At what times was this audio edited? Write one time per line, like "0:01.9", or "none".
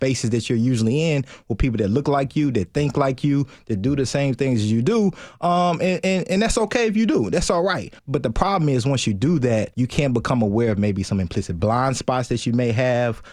0:08.0
0:09.7
0:11.6

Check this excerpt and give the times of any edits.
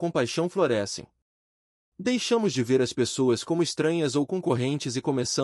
none

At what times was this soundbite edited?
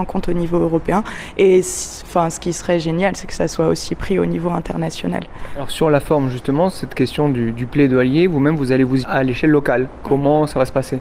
0:09.0

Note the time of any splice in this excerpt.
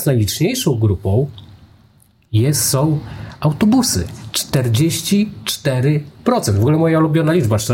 none

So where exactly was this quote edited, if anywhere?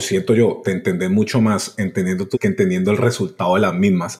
0:02.3

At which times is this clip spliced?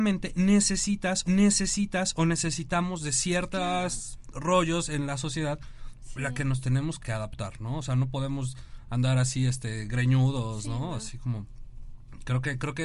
0:01.2
0:07.0

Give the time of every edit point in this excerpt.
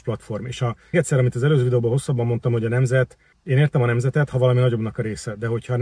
0:00.9
0:03.3

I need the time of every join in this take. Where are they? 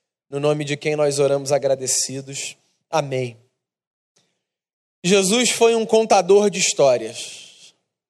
none

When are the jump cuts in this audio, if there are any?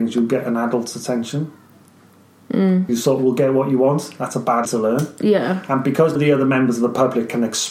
0:02.9
0:04.6
0:06.1

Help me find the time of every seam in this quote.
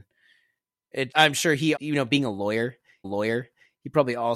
0:01.1
0:01.8
0:03.0

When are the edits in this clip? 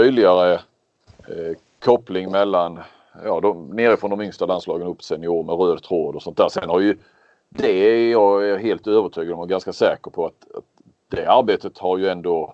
none

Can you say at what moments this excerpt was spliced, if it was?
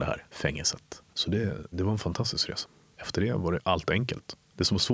0:01.1

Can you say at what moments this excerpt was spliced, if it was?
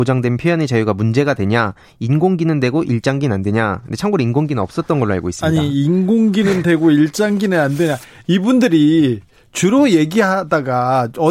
none

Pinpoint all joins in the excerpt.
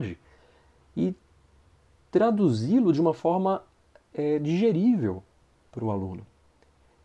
none

